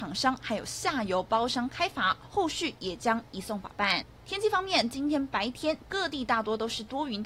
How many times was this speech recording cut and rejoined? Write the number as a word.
one